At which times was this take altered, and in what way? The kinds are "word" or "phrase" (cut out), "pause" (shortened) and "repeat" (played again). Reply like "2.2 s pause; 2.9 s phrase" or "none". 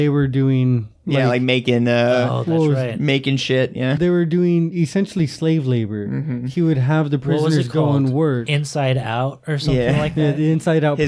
4.0 s word